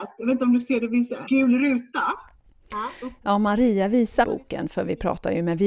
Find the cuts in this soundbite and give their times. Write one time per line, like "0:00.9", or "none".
0:01.3
0:04.2